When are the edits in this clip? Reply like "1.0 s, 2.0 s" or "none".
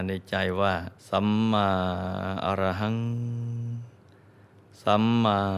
1.0 s